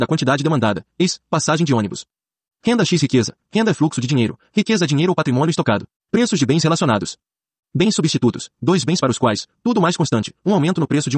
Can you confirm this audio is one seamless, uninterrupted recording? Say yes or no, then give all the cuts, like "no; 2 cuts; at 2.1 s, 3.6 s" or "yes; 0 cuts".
no; 1 cut; at 5.9 s